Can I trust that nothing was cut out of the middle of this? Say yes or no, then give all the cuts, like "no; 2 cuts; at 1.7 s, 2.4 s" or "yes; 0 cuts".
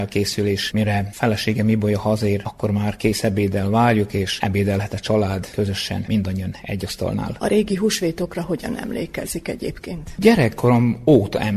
yes; 0 cuts